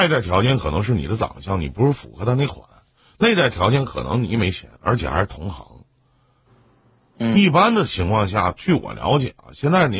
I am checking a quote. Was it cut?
yes; 1 cut; at 4.8 s

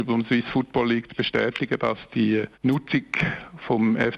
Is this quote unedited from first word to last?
yes; 0 cuts

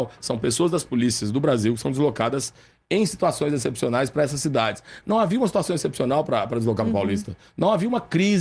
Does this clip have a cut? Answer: no; 0 cuts

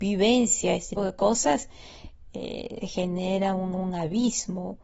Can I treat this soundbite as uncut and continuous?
no; 3 cuts; at 1.0 s, 2.8 s, 3.7 s

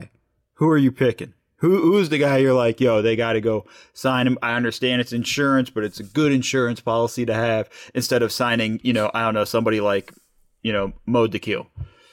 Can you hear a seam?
no; 0 cuts

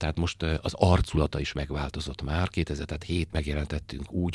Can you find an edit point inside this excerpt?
yes; 1 cut; at 3.3 s

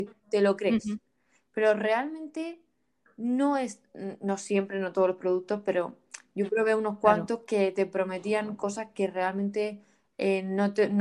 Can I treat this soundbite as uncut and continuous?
yes; 0 cuts

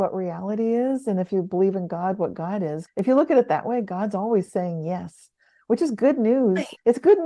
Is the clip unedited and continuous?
yes; 0 cuts

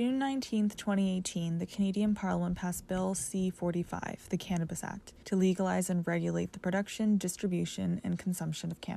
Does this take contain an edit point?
yes; 1 cut; at 5.2 s

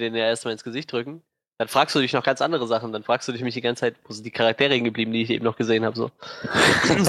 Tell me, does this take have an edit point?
no; 0 cuts

